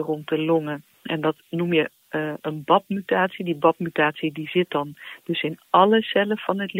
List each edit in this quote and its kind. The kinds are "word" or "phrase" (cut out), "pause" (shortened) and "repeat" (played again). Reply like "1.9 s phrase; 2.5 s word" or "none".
0.9 s pause